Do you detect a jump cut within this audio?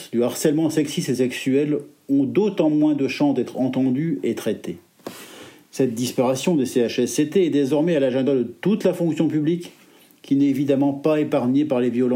no; 0 cuts

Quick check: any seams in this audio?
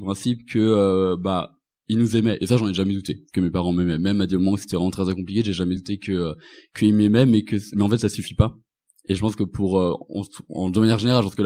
no; 0 cuts

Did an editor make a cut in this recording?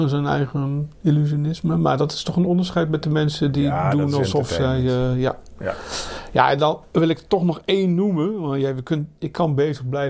no; 0 cuts

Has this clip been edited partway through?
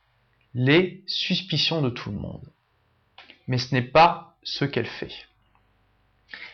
no; 0 cuts

